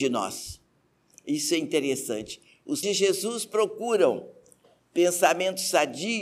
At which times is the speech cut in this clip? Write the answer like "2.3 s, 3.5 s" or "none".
2.8 s

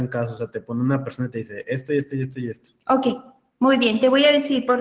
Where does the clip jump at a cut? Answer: none

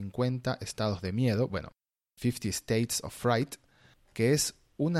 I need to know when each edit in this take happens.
none

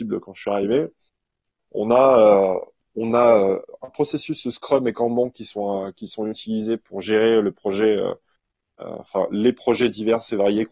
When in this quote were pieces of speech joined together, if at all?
none

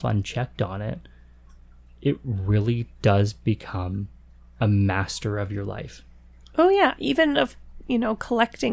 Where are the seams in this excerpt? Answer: none

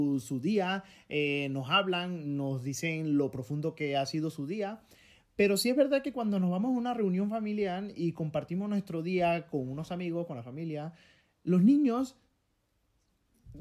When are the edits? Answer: none

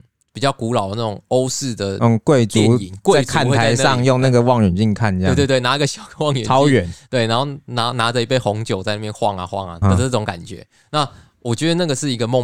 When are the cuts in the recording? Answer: 9.8 s

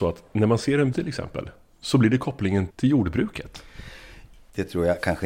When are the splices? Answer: 0.9 s, 2.7 s

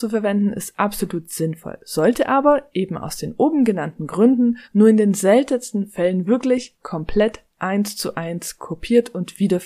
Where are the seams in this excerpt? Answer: 4.6 s

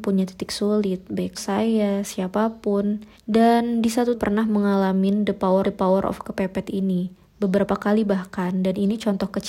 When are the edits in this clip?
1.3 s, 3.1 s, 4.1 s, 5.6 s

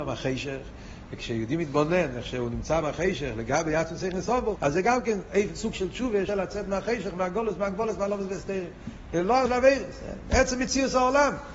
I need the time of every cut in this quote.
2.8 s, 4.6 s, 6.3 s, 9.5 s

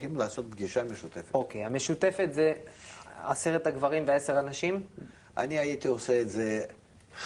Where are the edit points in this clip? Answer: none

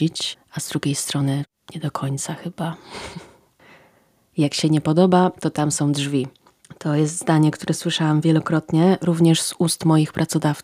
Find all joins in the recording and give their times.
none

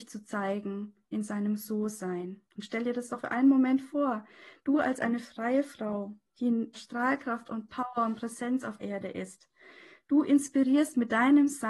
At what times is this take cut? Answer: 1.0 s, 2.5 s, 3.2 s, 6.3 s, 6.7 s, 8.8 s

